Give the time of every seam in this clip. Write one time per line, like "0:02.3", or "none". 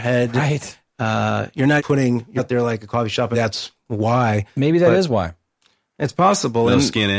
0:01.8
0:02.4
0:03.3